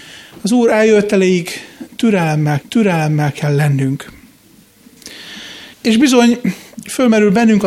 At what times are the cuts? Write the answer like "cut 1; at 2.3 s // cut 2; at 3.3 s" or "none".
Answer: cut 1; at 2.6 s // cut 2; at 5.7 s